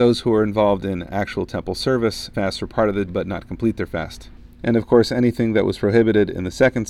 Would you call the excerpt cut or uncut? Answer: cut